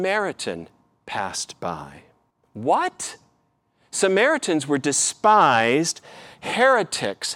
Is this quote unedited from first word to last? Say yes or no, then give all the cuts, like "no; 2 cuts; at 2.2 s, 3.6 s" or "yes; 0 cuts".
no; 1 cut; at 2.3 s